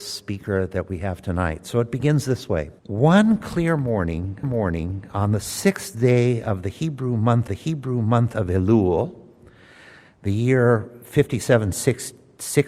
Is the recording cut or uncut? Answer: cut